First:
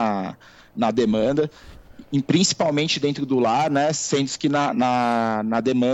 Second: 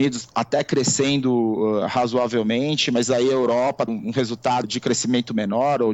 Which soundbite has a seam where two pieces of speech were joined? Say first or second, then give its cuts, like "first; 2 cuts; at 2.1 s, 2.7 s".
second; 2 cuts; at 3.9 s, 4.6 s